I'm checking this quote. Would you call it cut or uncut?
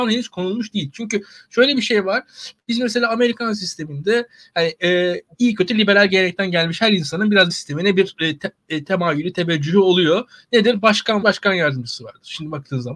cut